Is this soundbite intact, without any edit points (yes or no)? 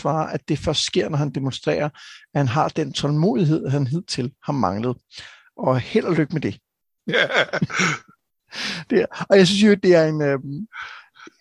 yes